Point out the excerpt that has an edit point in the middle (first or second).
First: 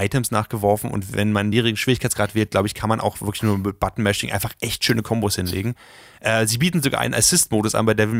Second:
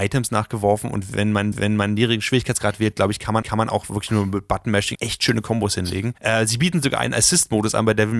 second